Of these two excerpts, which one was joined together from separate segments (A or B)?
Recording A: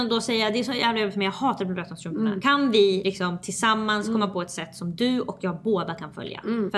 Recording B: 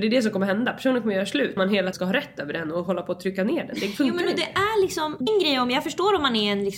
B